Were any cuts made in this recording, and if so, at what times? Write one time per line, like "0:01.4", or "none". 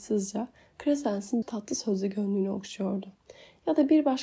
0:01.4